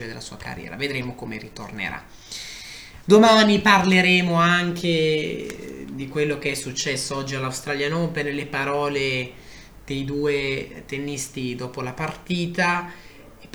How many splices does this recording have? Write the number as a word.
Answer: zero